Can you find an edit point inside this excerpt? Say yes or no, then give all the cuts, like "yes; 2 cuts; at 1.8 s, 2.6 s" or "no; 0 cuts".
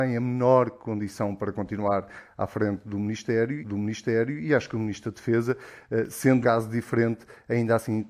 yes; 2 cuts; at 3.6 s, 6.4 s